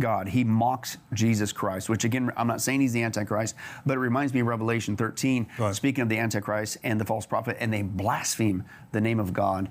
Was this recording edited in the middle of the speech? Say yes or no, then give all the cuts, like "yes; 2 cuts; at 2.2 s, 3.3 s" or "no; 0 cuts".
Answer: no; 0 cuts